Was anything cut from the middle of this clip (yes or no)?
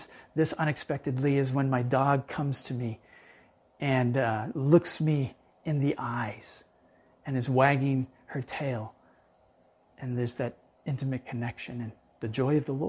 no